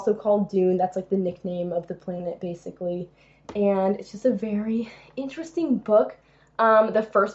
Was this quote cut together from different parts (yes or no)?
no